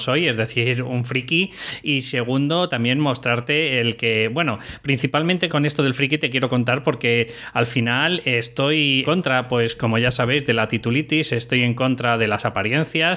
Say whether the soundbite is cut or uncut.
cut